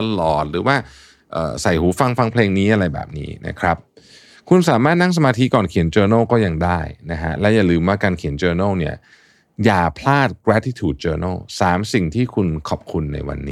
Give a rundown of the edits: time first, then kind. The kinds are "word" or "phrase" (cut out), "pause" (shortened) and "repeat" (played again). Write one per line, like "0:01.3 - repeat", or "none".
none